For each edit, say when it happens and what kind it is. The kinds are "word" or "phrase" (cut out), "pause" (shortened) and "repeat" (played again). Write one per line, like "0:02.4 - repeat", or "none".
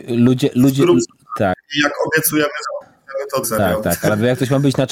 0:03.4 - word